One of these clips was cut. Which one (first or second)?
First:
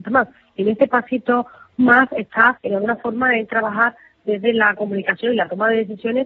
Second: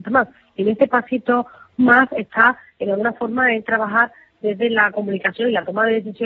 first